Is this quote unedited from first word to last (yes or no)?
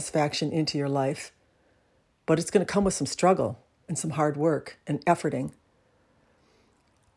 yes